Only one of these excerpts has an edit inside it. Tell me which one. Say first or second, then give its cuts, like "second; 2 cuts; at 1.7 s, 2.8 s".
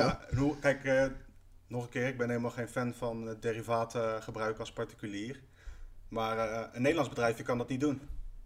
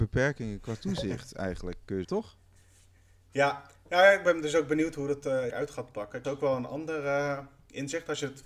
second; 3 cuts; at 2.0 s, 5.5 s, 6.2 s